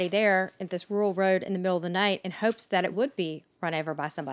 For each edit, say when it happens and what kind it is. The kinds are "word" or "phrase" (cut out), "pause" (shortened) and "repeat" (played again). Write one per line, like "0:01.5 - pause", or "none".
0:02.9 - word